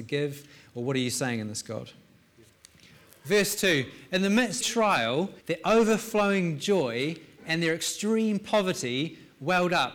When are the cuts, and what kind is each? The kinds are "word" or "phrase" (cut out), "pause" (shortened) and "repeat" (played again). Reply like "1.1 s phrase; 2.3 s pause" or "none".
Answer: 2.5 s pause; 4.6 s phrase; 5.4 s pause